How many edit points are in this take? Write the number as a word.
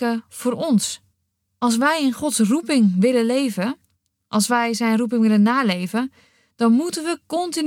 one